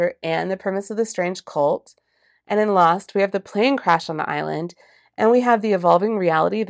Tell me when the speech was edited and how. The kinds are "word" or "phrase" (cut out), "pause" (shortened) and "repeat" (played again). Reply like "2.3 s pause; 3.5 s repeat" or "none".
none